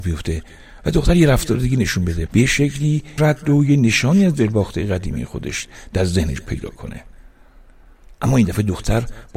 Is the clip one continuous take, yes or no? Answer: no